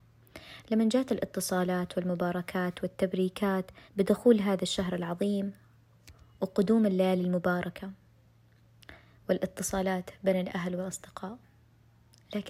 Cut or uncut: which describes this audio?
cut